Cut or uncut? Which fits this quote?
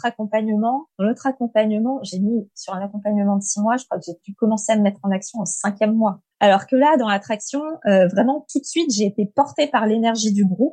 cut